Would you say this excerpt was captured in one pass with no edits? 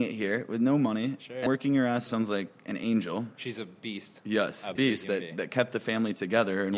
no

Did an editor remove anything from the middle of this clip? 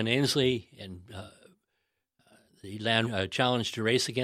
yes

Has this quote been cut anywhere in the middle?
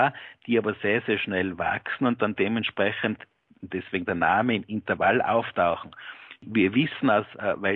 no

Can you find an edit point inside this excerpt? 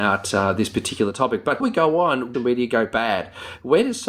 yes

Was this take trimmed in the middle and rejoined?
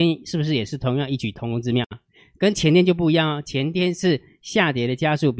no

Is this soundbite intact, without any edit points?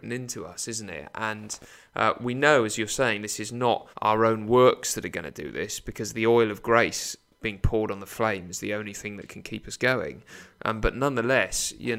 no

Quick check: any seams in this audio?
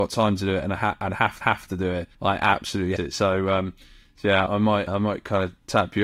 yes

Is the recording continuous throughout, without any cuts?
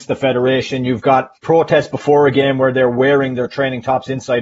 no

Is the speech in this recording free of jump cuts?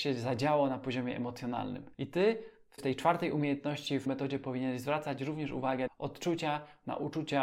no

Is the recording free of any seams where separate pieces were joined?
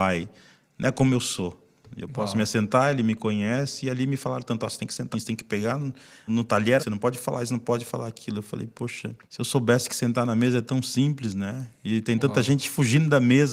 no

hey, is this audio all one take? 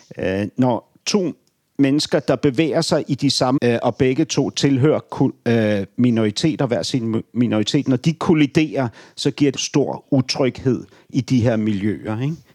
no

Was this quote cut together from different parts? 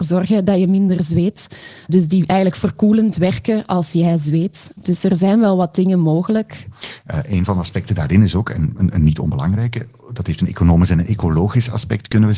no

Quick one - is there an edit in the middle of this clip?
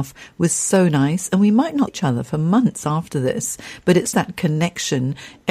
yes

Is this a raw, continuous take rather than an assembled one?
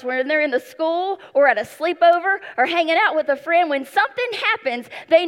yes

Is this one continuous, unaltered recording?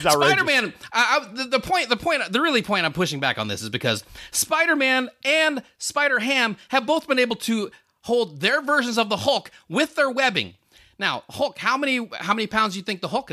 yes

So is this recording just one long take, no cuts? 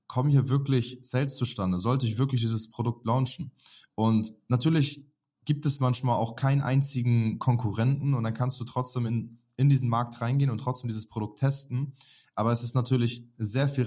yes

